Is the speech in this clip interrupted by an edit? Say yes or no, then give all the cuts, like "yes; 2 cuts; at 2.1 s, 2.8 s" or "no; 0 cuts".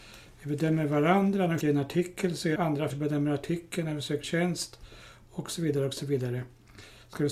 yes; 4 cuts; at 1.6 s, 2.6 s, 2.9 s, 4.2 s